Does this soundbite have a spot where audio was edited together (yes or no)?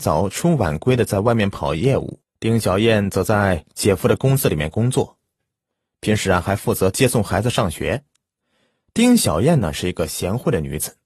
yes